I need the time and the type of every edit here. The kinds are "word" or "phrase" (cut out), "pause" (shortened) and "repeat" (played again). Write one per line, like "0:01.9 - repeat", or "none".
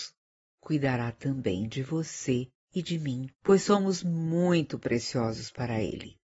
0:03.3 - pause